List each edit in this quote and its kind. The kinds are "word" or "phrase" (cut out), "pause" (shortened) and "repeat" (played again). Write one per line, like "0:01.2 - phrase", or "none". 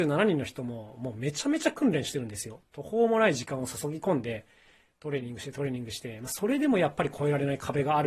none